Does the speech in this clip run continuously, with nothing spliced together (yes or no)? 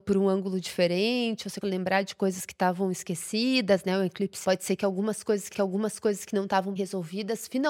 no